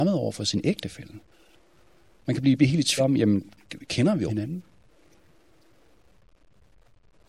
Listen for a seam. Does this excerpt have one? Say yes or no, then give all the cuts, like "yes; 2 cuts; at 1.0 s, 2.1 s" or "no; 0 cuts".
yes; 3 cuts; at 2.6 s, 3.0 s, 4.3 s